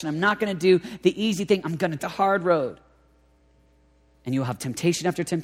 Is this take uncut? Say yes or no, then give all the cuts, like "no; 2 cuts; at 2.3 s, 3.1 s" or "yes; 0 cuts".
no; 2 cuts; at 2.0 s, 3.4 s